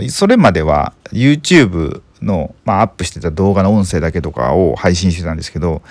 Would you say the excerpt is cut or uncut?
cut